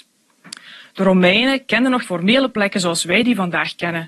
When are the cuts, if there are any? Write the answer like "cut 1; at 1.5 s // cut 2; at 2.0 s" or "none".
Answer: cut 1; at 2.0 s

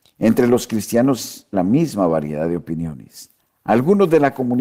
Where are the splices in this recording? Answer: cut 1; at 1.5 s // cut 2; at 3.4 s

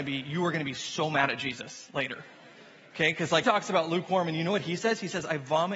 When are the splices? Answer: cut 1; at 3.4 s

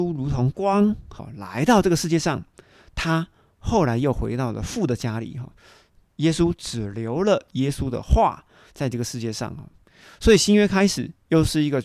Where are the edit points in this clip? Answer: none

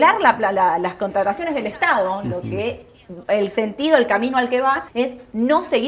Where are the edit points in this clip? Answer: cut 1; at 4.9 s

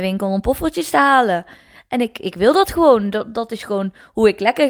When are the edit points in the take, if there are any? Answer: none

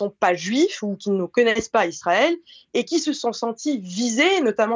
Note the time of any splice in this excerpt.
none

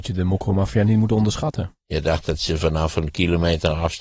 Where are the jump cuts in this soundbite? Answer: none

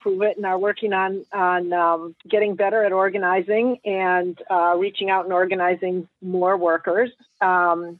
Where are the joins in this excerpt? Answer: cut 1; at 2.2 s

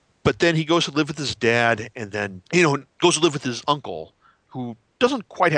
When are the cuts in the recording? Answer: cut 1; at 2.5 s

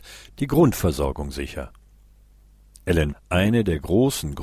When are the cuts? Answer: cut 1; at 3.1 s

